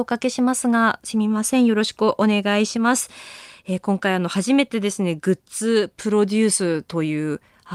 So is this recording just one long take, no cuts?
yes; 0 cuts

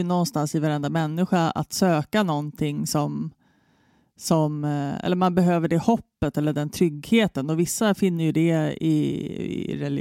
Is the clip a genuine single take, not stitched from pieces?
yes; 0 cuts

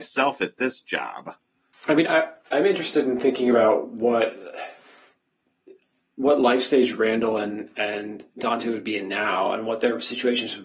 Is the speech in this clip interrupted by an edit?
yes; 1 cut; at 2.0 s

